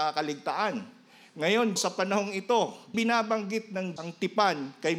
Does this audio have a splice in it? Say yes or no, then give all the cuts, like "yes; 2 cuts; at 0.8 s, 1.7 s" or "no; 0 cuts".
yes; 3 cuts; at 1.8 s, 2.9 s, 4.0 s